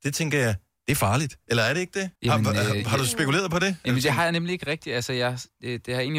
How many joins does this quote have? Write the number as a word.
one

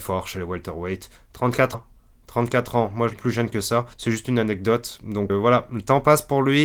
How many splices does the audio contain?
four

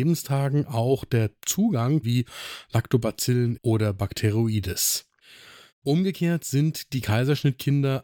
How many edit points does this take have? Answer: two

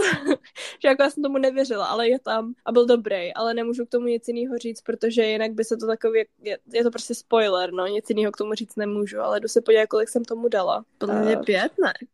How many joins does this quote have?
two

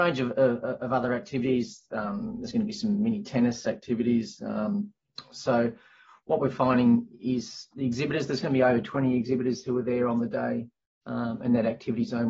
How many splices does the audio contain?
zero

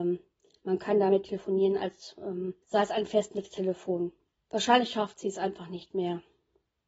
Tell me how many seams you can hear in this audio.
two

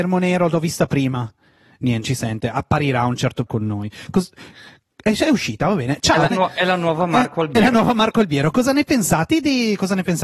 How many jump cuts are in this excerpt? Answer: three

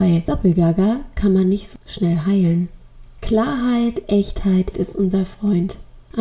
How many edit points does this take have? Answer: one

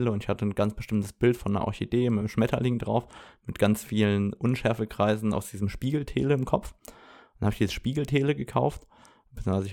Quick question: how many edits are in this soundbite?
zero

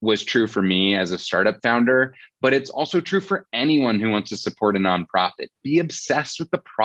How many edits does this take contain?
zero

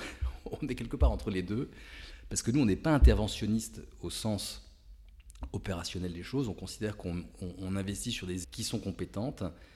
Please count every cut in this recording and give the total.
one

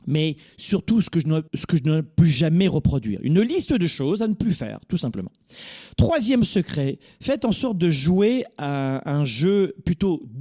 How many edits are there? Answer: one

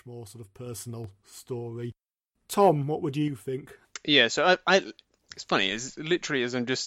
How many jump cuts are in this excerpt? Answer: zero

